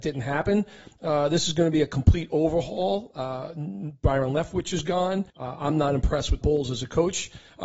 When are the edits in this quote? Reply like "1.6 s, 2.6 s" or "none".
5.3 s, 6.4 s